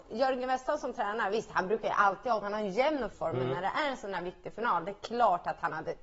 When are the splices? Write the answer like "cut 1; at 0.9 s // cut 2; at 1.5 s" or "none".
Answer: cut 1; at 2.4 s // cut 2; at 3.1 s